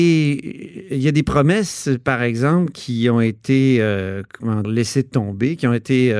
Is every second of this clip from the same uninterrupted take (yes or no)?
no